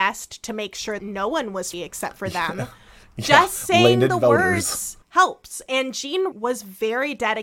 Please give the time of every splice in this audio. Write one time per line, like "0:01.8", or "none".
0:01.0
0:01.7
0:05.0
0:06.3